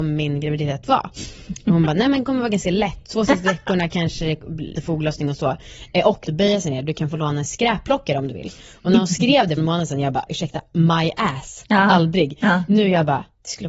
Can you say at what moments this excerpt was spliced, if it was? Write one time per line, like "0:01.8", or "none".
0:04.8
0:06.3
0:09.6
0:10.3